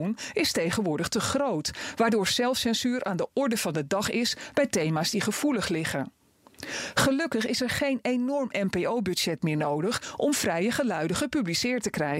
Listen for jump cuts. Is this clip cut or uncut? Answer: uncut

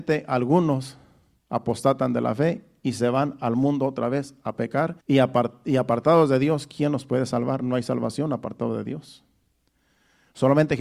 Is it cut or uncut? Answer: cut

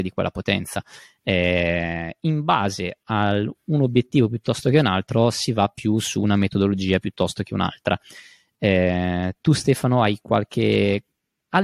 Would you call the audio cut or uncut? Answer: uncut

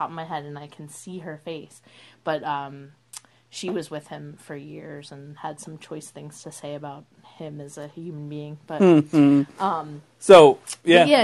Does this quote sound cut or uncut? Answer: uncut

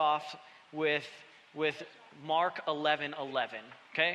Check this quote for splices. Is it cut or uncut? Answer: uncut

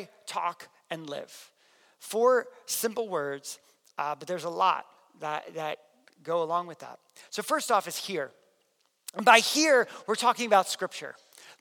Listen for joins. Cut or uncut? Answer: uncut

